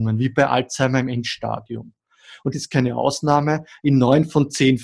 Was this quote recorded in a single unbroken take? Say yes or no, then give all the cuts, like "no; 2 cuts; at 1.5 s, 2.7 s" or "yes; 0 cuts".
no; 1 cut; at 2.5 s